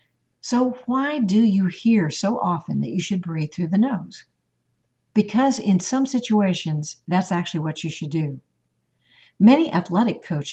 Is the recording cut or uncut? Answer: uncut